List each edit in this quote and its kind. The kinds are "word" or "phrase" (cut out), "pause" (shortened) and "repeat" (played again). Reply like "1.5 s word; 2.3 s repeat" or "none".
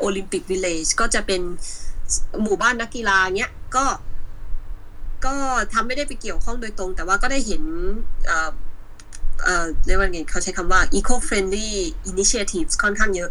none

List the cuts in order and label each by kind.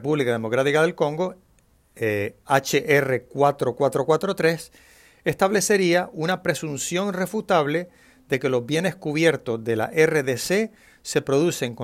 none

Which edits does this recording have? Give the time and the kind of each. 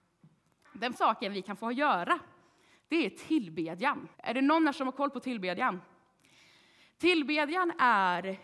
1.0 s word; 4.1 s pause

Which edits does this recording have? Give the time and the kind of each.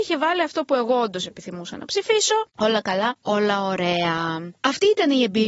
2.5 s pause; 4.6 s pause

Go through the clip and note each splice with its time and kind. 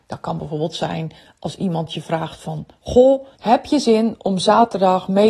3.3 s pause

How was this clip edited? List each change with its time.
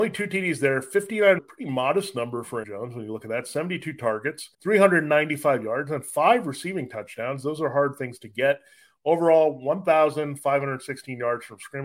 1.4 s phrase; 2.6 s word; 4.5 s pause

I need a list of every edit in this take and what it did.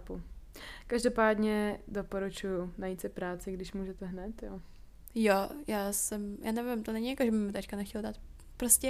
none

